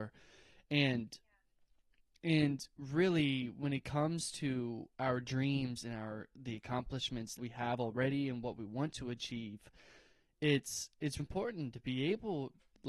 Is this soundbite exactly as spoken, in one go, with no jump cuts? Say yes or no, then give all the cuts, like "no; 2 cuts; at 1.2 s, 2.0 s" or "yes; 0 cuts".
no; 2 cuts; at 7.4 s, 11.2 s